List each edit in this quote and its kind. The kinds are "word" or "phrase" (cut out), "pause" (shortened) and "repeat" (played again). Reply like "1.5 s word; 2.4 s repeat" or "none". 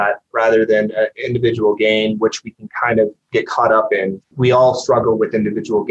3.2 s pause; 4.3 s word